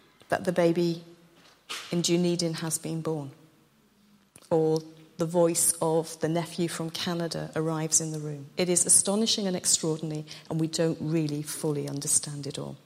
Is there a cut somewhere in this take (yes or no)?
no